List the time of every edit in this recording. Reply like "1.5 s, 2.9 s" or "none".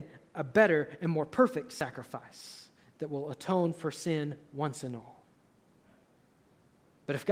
none